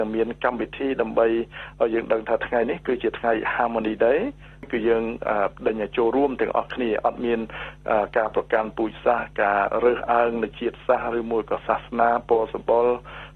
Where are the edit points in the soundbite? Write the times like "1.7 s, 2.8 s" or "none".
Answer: none